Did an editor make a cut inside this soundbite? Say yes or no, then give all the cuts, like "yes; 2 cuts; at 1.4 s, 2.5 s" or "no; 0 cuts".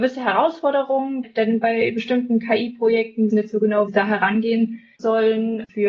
yes; 3 cuts; at 1.2 s, 3.3 s, 3.9 s